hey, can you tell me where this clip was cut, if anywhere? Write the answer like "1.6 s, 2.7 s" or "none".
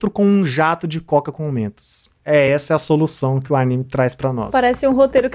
none